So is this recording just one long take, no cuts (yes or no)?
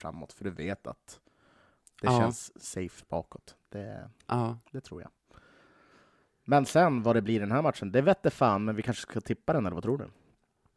yes